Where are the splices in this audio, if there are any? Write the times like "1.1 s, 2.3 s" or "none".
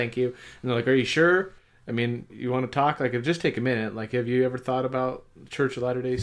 2.3 s